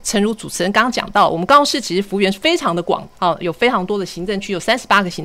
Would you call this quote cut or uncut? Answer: cut